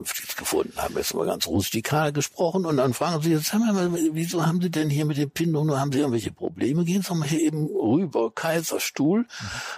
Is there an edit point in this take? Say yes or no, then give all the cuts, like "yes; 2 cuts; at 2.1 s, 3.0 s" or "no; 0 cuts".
no; 0 cuts